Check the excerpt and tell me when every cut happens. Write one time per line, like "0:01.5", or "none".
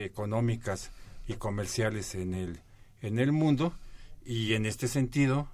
none